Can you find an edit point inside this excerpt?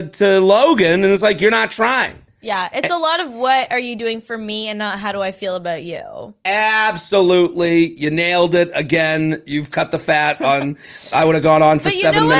yes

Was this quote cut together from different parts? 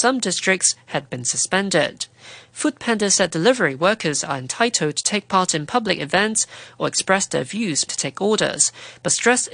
yes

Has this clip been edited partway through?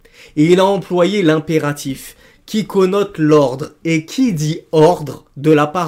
no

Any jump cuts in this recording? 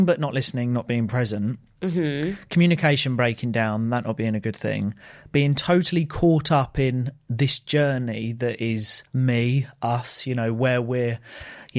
yes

